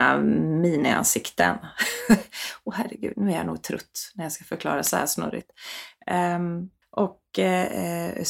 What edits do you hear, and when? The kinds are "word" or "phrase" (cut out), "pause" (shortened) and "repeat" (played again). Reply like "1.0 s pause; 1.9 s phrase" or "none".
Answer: 6.8 s pause